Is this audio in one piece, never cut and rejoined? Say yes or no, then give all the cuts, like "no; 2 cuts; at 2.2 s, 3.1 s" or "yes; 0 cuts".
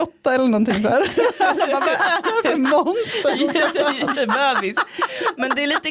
no; 1 cut; at 4.1 s